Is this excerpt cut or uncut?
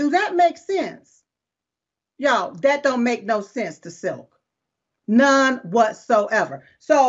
uncut